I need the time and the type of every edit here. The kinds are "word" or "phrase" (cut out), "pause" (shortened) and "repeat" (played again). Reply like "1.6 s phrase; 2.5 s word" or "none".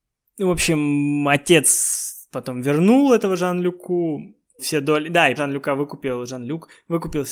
4.6 s word; 5.4 s word